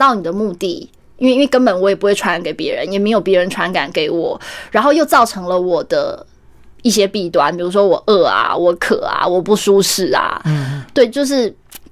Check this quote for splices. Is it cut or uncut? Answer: uncut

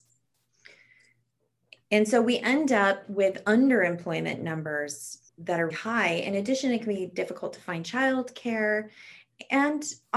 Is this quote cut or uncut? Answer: cut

